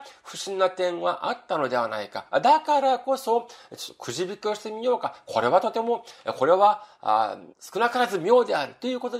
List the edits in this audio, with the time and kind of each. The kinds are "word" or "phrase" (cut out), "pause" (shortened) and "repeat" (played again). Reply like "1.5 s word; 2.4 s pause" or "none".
7.5 s pause